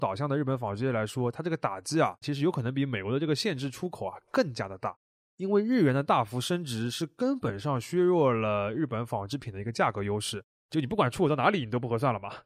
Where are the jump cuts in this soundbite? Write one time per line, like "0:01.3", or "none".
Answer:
0:02.2